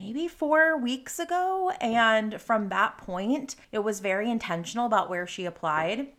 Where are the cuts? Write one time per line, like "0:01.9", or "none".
0:03.6